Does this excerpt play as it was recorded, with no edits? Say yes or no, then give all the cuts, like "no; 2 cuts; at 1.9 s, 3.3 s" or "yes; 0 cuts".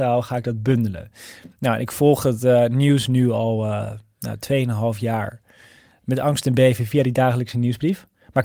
yes; 0 cuts